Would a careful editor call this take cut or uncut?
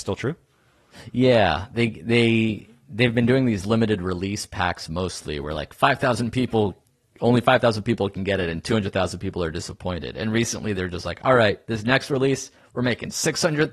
uncut